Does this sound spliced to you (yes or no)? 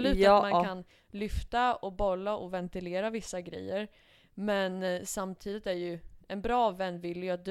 no